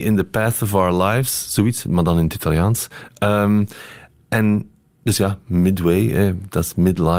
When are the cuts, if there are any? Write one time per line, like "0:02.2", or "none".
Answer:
none